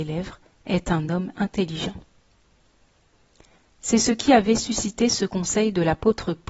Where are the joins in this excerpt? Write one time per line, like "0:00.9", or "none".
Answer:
none